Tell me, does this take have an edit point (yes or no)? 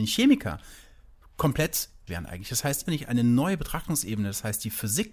yes